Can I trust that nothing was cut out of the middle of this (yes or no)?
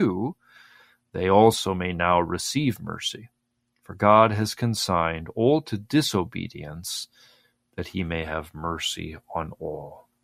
yes